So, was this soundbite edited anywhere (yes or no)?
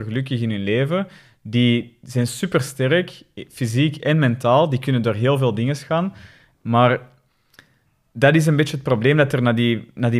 no